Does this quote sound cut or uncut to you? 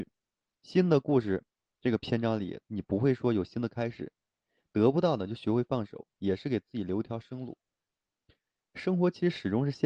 uncut